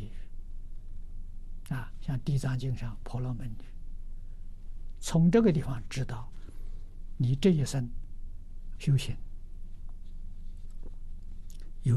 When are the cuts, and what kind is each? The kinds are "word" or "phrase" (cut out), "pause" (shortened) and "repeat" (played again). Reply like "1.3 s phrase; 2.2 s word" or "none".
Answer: 8.8 s word

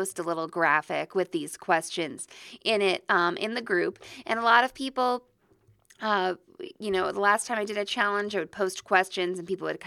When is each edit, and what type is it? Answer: none

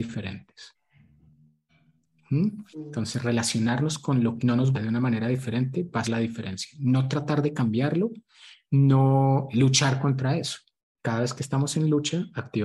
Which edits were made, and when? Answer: 4.4 s word; 4.7 s word; 6.0 s word; 9.5 s word

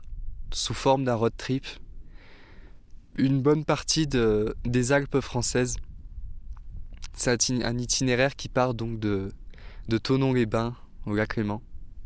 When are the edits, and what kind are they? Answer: none

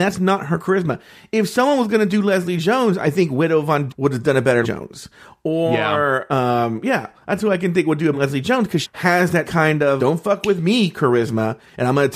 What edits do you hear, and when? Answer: 3.9 s word; 4.6 s word; 8.1 s word; 8.8 s word; 9.4 s word; 10.0 s word

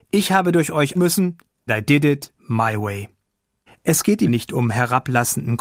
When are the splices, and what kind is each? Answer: 0.9 s word; 1.7 s word; 2.4 s pause; 3.7 s pause; 4.3 s word

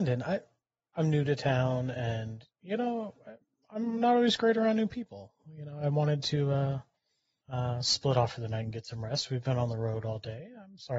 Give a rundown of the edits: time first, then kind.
none

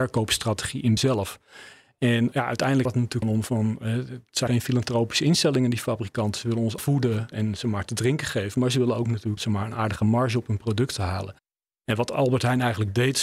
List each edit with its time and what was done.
1.0 s word; 2.3 s word; 2.9 s word; 3.2 s word; 4.5 s word; 6.8 s word; 7.3 s word; 9.4 s word

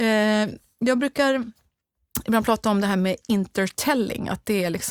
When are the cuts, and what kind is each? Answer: none

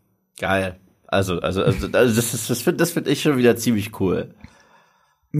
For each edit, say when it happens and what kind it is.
none

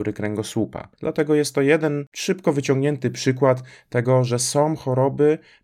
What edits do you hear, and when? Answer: 0.9 s pause

